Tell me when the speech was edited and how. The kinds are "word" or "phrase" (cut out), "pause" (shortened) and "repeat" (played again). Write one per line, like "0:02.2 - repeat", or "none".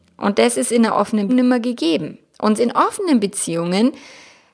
0:01.3 - word
0:02.6 - word